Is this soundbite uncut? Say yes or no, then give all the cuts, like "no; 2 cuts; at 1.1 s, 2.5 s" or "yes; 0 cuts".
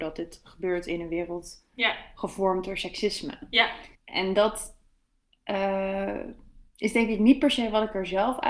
no; 2 cuts; at 3.9 s, 6.7 s